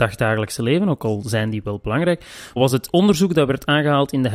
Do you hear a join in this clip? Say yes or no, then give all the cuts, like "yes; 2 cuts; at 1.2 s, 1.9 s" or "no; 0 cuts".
no; 0 cuts